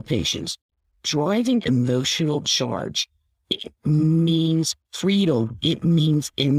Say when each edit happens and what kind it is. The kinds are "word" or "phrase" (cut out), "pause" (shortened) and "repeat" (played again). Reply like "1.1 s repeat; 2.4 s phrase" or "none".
1.6 s phrase

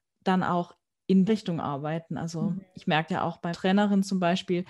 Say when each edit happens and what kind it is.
1.3 s word; 3.1 s word; 3.5 s word

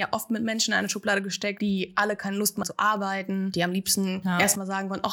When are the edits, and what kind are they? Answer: 2.6 s word

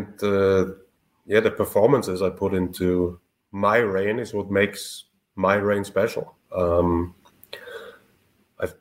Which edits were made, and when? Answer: none

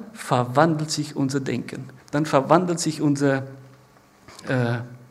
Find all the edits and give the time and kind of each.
2.0 s pause

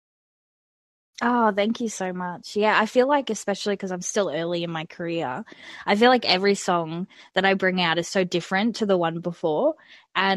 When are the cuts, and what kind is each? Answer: none

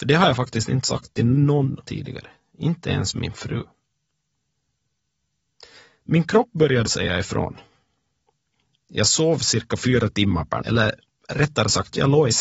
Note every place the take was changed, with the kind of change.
1.8 s word; 6.8 s word; 10.6 s word

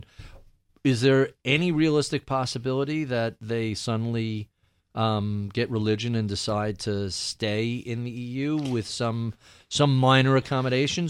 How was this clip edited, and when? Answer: none

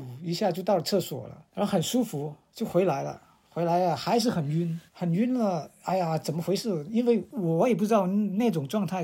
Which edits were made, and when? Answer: 1.5 s pause; 4.9 s pause

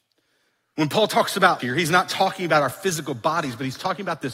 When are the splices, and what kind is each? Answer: 1.6 s word

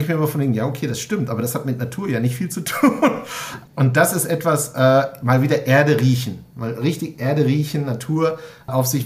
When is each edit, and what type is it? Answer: 3.7 s pause

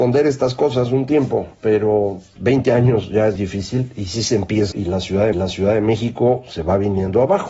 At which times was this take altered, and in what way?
2.4 s word; 3.3 s word; 4.7 s phrase; 5.3 s repeat

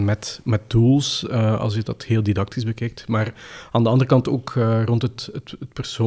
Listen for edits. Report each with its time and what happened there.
none

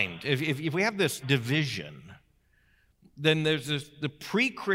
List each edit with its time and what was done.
1.2 s phrase

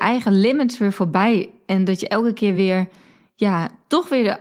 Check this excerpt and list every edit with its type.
none

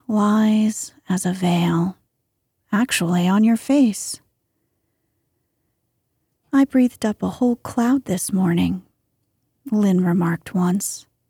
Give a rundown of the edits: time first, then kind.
none

